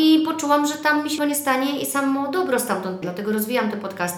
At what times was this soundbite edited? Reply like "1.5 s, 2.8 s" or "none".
1.2 s, 3.0 s

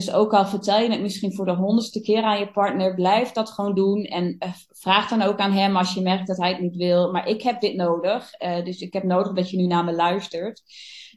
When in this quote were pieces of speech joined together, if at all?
none

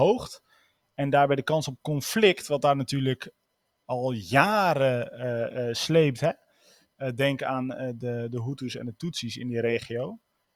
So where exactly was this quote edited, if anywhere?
none

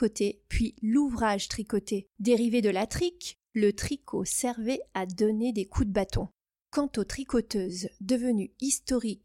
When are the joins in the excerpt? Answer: 2.1 s

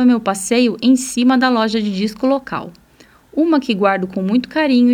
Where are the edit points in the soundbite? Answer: none

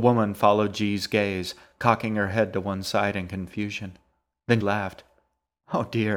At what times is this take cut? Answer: 4.6 s

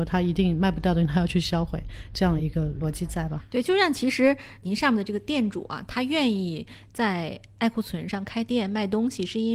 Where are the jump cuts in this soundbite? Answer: none

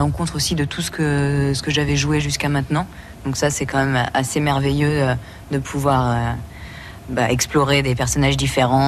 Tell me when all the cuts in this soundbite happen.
none

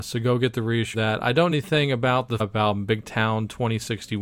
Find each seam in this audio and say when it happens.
0.9 s, 1.5 s, 2.4 s

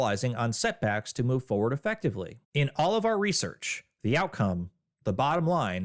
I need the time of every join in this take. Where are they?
2.4 s

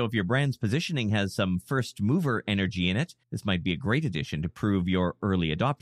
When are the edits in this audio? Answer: 3.2 s

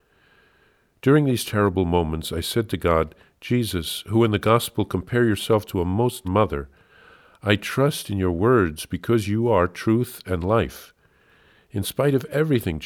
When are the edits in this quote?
6.2 s

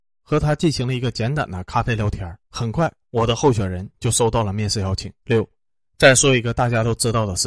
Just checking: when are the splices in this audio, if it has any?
2.4 s, 5.2 s

